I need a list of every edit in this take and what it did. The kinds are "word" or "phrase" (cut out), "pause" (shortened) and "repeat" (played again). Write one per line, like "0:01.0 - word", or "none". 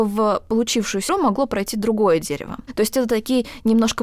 0:01.1 - word